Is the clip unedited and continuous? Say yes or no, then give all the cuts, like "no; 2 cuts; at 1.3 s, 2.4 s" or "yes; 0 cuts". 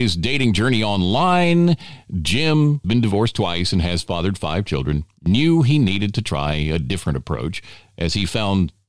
no; 1 cut; at 2.8 s